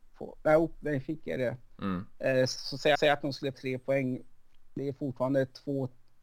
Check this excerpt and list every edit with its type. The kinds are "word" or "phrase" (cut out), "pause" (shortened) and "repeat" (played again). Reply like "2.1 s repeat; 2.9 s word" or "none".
2.9 s repeat; 3.5 s word